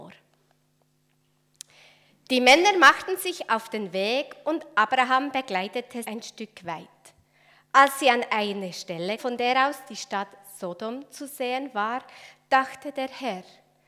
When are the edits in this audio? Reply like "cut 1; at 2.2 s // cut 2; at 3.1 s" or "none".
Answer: cut 1; at 6.0 s // cut 2; at 9.2 s